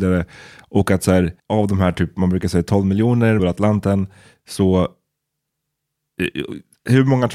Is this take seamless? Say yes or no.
no